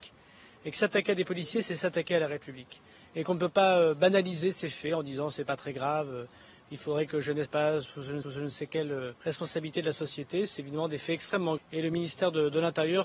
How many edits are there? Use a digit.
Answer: 4